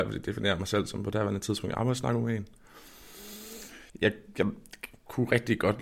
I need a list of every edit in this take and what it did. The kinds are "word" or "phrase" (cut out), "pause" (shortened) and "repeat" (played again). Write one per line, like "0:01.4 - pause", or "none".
0:03.9 - pause